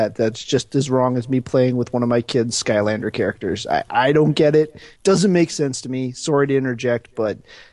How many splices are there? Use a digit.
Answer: 2